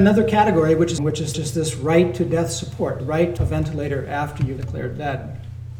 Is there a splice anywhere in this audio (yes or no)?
yes